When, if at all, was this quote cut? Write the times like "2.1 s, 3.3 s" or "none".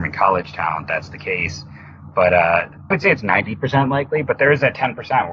2.9 s